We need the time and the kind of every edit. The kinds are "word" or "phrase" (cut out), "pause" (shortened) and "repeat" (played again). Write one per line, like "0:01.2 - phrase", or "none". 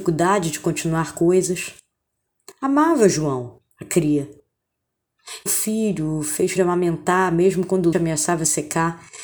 0:03.7 - pause
0:05.5 - phrase
0:06.6 - word
0:07.9 - word